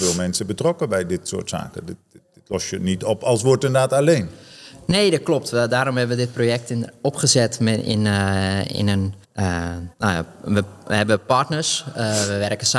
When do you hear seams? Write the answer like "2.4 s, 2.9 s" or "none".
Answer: 9.2 s, 9.9 s